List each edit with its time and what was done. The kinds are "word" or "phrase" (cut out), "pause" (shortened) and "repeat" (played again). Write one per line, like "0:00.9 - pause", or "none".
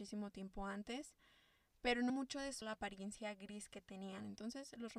0:02.1 - word
0:02.6 - word